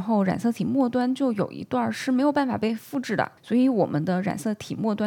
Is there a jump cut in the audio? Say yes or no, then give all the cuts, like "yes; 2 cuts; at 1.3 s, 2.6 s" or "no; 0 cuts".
yes; 1 cut; at 3.4 s